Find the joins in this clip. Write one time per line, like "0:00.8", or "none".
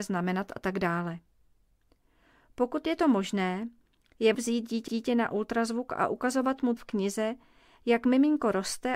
0:04.3
0:04.9
0:06.8

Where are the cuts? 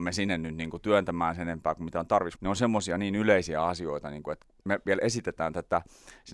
0:02.4

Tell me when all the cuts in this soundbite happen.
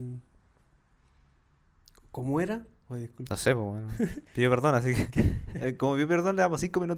0:04.2

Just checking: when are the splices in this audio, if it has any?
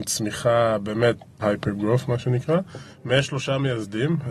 0:01.4

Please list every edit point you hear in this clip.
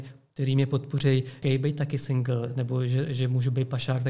0:01.4

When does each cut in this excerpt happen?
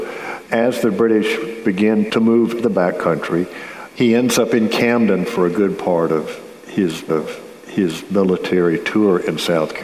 0:02.6
0:07.1

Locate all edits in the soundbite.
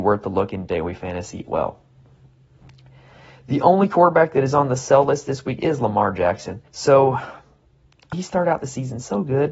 0:01.5
0:06.7
0:08.1

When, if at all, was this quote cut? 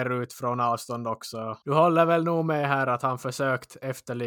0:01.6

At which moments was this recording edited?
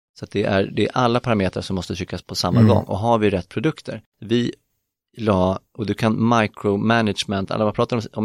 0:02.2
0:04.1

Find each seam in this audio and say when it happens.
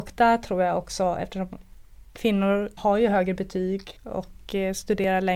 0:02.8
0:04.0

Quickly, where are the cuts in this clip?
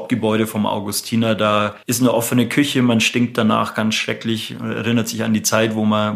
0:01.8

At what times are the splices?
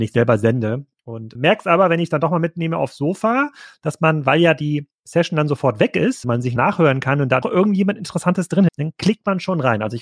0:01.3
0:06.2
0:06.6
0:07.4
0:08.7

